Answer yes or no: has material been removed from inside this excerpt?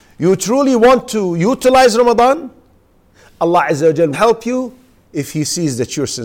yes